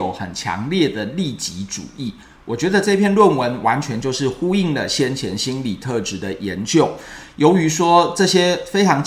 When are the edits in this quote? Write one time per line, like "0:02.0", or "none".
none

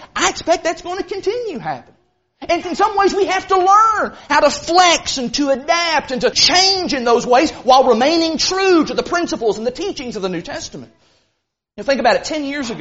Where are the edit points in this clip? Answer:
0:02.6
0:06.3

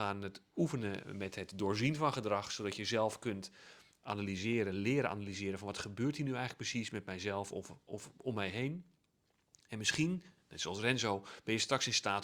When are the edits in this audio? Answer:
none

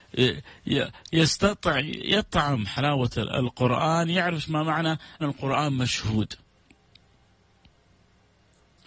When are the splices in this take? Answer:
0:05.2

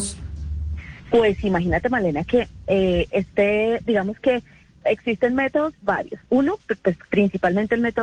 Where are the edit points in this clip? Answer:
none

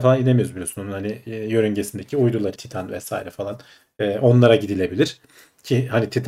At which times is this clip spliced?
0:02.6

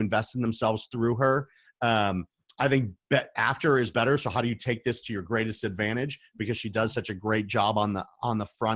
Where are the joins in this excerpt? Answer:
none

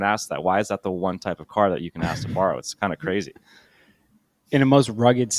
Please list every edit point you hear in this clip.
none

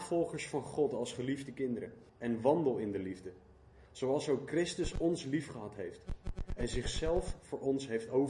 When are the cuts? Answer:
0:02.1

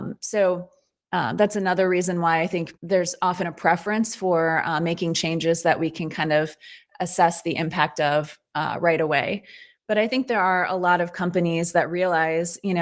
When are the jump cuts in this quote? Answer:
0:02.8

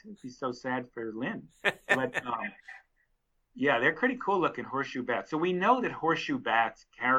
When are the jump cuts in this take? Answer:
none

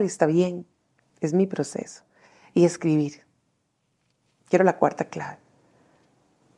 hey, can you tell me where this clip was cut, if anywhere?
none

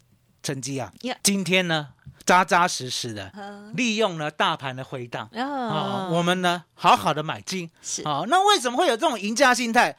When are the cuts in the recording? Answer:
0:01.2
0:02.2
0:03.3

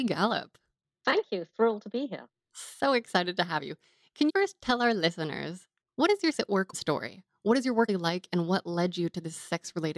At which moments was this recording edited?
0:04.3
0:06.3
0:06.7
0:07.9

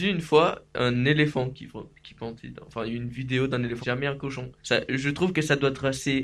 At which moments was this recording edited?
0:03.8
0:04.6

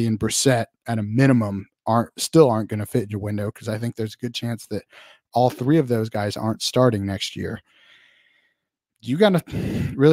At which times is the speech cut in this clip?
none

